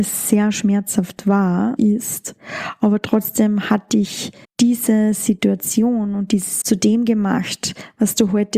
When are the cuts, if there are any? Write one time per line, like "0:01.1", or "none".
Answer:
0:01.8
0:04.4
0:06.6